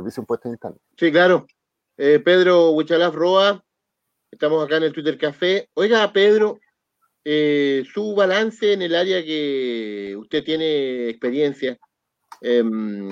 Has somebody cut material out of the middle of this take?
yes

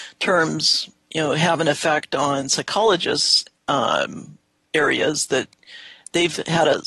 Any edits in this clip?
no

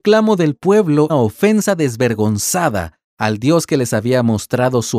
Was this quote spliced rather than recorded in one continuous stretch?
yes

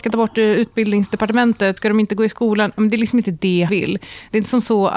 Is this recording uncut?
no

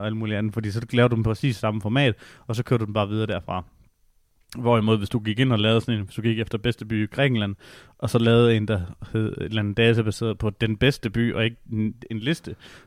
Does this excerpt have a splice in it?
no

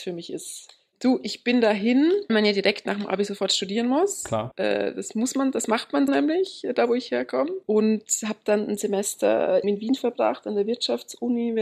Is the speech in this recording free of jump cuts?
no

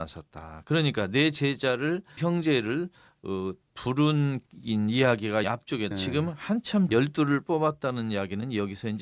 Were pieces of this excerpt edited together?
yes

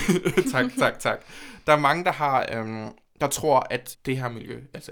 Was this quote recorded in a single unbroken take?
no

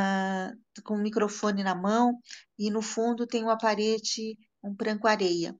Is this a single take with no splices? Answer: yes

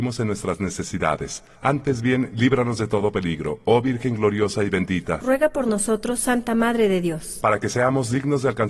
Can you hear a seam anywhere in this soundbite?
no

